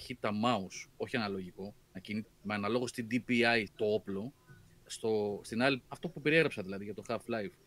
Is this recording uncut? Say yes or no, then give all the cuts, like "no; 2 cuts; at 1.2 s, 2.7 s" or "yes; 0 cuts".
no; 5 cuts; at 1.8 s, 2.2 s, 3.7 s, 4.8 s, 5.8 s